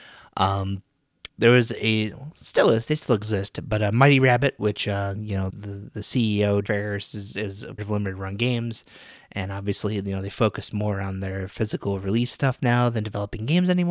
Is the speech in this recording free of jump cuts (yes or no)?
no